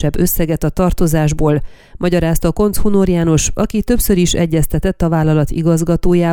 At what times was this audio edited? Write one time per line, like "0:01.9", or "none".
none